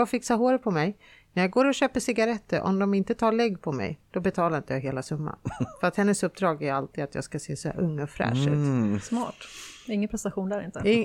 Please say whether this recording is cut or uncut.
uncut